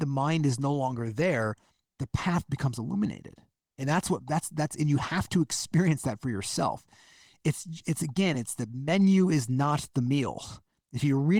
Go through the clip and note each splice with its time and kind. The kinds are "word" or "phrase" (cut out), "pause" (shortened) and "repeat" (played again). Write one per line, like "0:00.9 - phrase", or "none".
none